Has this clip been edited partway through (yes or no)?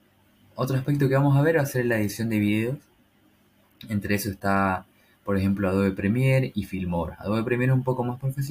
no